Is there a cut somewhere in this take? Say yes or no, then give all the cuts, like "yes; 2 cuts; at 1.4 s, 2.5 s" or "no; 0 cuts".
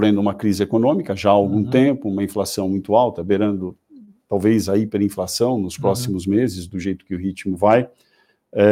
no; 0 cuts